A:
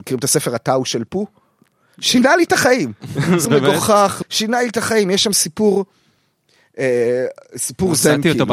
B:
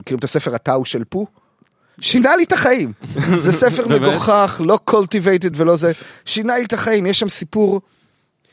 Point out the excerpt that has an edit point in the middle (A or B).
A